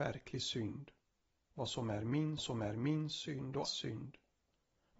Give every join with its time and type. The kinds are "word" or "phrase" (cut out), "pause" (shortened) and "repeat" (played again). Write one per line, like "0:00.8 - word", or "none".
0:02.4 - repeat
0:03.6 - word